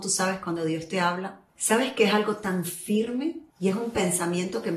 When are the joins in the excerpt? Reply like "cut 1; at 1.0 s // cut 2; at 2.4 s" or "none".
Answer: cut 1; at 1.5 s // cut 2; at 3.5 s